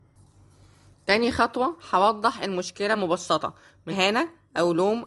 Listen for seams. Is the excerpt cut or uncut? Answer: cut